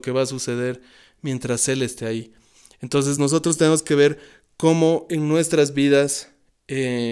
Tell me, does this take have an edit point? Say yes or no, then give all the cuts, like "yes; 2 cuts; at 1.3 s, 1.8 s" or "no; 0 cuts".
no; 0 cuts